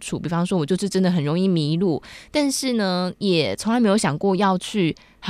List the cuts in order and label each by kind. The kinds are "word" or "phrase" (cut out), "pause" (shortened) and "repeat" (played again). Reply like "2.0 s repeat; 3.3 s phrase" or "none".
none